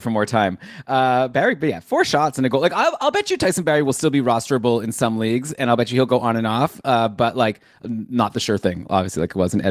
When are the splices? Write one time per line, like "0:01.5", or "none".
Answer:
none